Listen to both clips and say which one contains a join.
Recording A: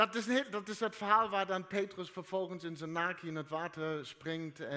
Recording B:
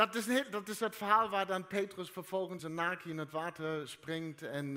B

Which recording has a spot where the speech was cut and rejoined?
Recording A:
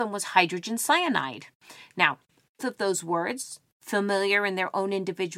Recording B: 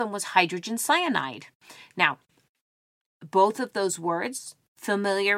A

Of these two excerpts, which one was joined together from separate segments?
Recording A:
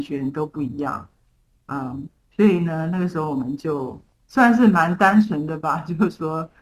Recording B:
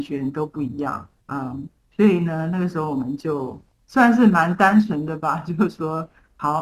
B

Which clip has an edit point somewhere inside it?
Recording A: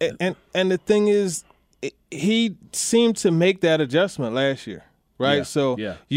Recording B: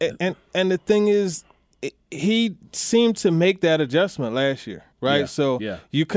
B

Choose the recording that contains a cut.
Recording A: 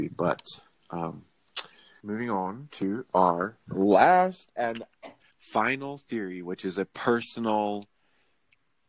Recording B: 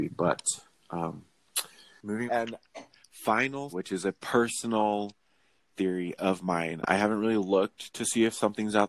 B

